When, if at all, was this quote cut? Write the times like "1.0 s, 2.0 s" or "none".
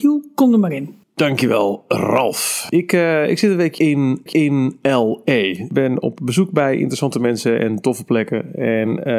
1.0 s, 4.3 s